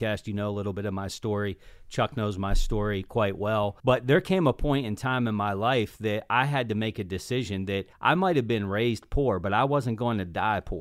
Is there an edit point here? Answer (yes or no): yes